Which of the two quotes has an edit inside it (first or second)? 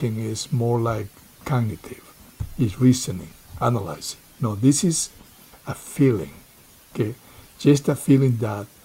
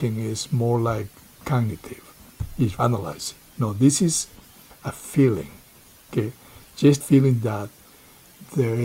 second